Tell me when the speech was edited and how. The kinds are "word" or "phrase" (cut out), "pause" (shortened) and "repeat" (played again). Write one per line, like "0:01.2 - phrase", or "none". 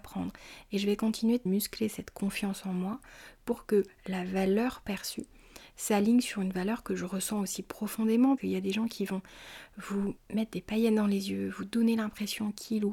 0:01.5 - phrase
0:08.4 - word
0:10.2 - pause